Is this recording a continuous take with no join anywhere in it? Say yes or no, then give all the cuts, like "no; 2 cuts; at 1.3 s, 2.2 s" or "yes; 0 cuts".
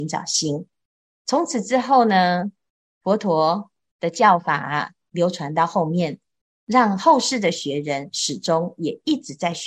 yes; 0 cuts